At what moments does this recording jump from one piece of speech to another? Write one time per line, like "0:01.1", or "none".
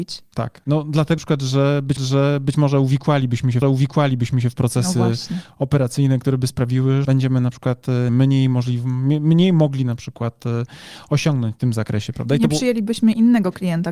0:01.2
0:02.0
0:03.6
0:07.0
0:08.1